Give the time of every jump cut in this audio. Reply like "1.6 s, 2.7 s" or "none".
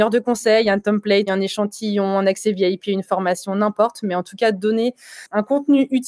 1.3 s